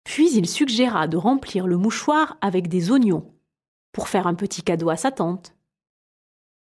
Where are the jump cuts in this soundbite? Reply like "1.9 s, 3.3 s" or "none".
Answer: none